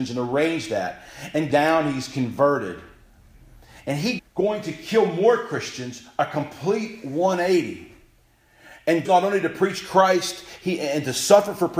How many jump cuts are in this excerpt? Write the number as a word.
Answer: three